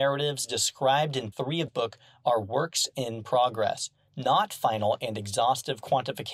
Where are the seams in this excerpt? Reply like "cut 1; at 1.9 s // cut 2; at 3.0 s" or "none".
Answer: cut 1; at 1.3 s // cut 2; at 1.7 s